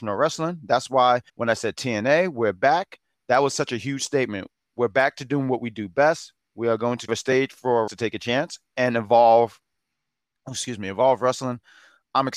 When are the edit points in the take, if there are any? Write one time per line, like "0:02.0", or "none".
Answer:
0:01.3
0:07.1
0:07.9